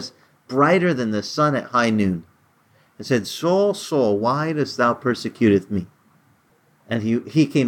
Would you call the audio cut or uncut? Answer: uncut